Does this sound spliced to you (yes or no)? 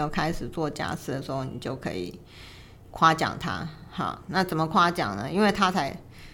no